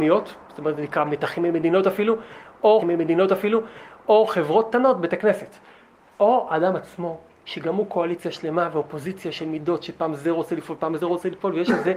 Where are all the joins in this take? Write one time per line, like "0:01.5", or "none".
0:02.8